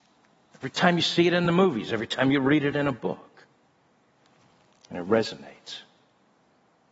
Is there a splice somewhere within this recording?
no; 0 cuts

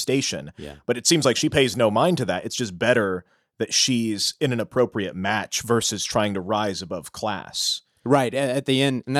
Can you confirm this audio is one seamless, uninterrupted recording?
yes; 0 cuts

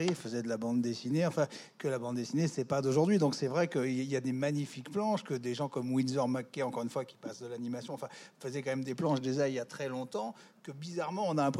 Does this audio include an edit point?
no; 0 cuts

